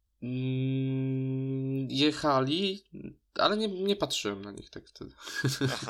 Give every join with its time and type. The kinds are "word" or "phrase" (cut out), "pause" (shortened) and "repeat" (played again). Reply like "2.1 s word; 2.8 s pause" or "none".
none